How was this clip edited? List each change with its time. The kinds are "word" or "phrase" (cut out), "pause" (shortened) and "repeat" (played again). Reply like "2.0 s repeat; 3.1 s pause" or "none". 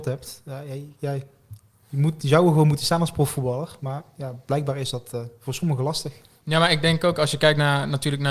none